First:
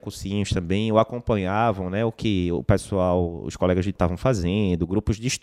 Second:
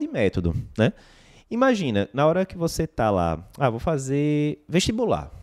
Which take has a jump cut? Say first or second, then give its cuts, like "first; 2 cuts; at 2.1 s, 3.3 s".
first; 1 cut; at 4.0 s